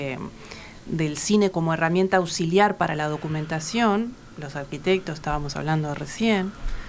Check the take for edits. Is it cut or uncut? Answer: cut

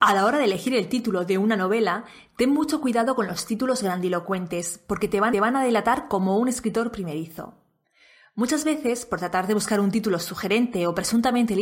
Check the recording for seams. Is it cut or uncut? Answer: cut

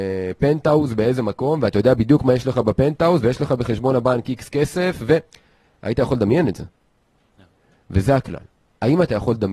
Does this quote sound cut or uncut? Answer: uncut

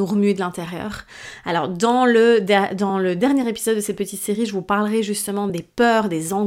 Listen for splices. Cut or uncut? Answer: uncut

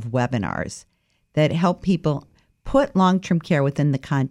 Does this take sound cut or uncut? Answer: uncut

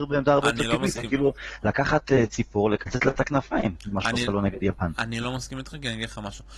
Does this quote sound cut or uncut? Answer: uncut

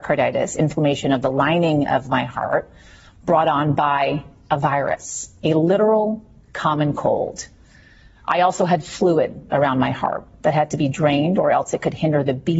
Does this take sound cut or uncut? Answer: uncut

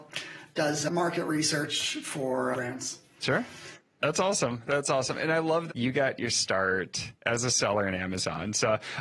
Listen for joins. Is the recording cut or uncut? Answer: cut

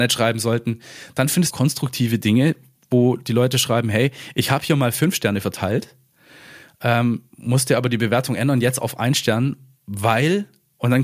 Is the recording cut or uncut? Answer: cut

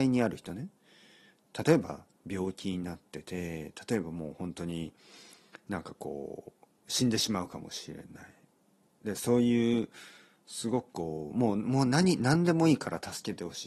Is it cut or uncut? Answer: uncut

